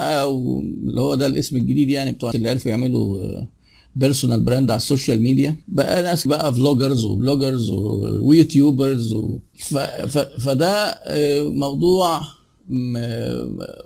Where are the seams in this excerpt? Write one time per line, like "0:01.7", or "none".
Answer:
0:02.3
0:05.6
0:06.3